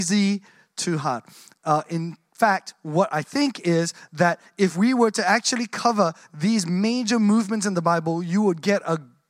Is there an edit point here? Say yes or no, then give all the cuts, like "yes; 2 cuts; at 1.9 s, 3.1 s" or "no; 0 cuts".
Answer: no; 0 cuts